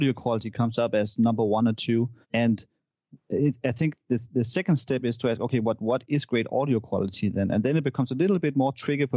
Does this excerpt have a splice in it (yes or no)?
yes